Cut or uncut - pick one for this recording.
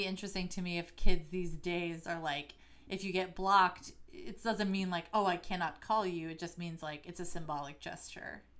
uncut